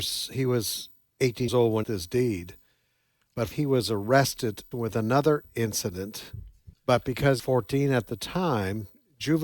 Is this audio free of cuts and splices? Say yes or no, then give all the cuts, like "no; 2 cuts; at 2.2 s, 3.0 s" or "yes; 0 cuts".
no; 6 cuts; at 1.5 s, 1.8 s, 3.5 s, 4.7 s, 6.7 s, 7.4 s